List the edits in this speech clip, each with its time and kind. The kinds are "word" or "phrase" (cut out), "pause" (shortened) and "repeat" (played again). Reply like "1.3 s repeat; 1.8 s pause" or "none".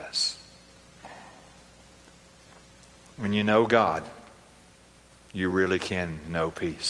none

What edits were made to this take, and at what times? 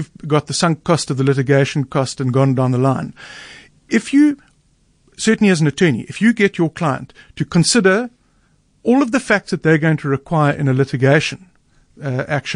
none

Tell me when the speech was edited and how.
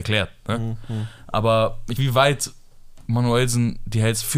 2.0 s phrase

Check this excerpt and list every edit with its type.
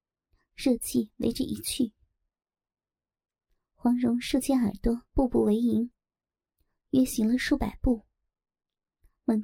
5.1 s pause

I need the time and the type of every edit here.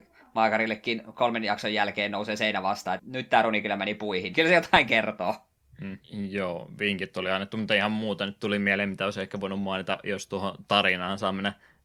3.0 s word; 4.3 s word; 6.0 s pause

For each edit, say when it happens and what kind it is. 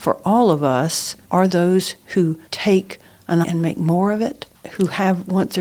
1.5 s word; 2.5 s pause; 3.4 s word

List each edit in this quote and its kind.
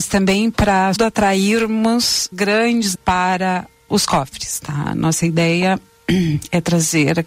1.0 s word; 2.3 s word; 2.9 s word; 3.9 s word

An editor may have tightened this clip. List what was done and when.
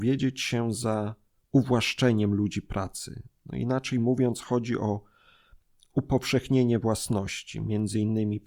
none

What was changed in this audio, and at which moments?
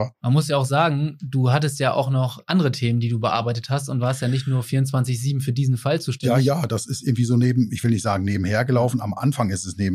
none

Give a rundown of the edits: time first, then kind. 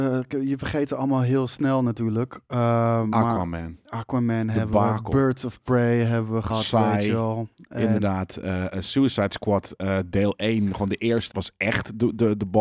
6.5 s phrase; 11.3 s word

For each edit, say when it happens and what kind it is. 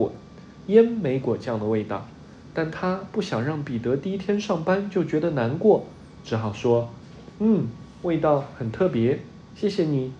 none

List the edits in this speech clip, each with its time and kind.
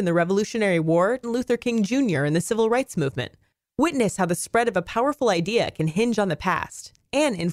1.2 s word

